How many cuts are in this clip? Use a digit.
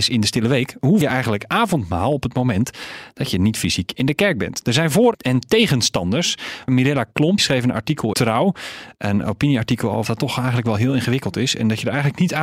6